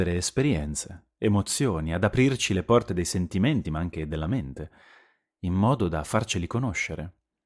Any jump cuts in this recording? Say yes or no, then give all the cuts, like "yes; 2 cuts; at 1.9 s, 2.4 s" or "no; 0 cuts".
no; 0 cuts